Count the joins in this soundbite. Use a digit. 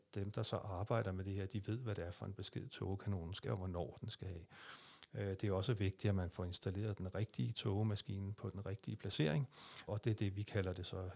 2